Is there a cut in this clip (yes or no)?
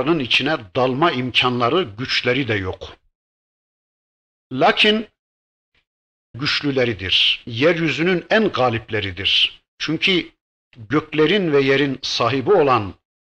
yes